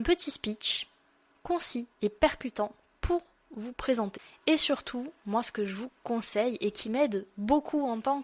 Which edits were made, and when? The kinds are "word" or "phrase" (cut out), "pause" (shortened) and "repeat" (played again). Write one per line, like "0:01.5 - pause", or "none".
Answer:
none